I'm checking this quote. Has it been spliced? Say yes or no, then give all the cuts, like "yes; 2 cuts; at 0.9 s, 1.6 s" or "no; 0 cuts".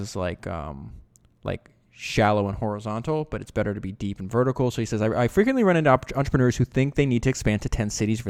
no; 0 cuts